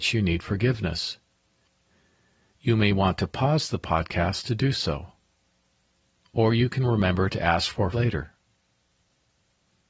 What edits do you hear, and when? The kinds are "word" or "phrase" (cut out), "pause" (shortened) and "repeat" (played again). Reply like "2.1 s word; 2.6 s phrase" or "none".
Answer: 7.9 s word